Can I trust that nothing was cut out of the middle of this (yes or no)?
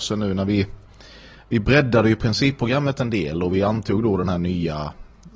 yes